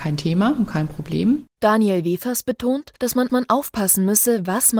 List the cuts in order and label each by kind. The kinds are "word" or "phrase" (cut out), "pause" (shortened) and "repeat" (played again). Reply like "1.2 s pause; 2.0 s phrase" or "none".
1.5 s pause; 3.0 s pause; 3.3 s repeat